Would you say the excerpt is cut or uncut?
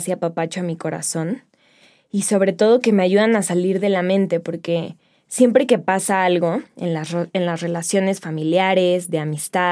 uncut